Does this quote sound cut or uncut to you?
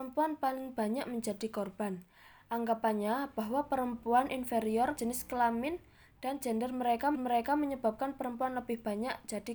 cut